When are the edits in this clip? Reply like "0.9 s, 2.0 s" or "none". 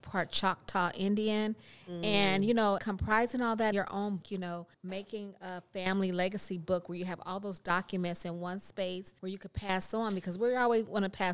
2.8 s, 3.7 s, 4.2 s, 4.7 s, 9.2 s

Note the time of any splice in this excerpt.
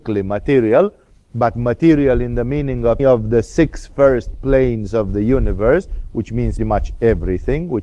3.0 s, 6.6 s

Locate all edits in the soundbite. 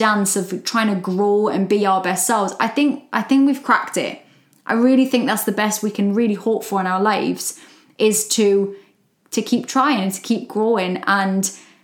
none

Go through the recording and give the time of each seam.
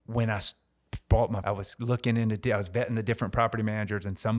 1.4 s

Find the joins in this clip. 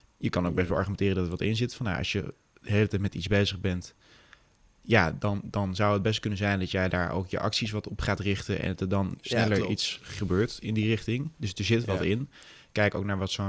none

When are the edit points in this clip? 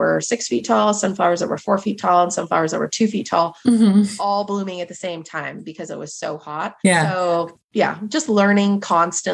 6.8 s

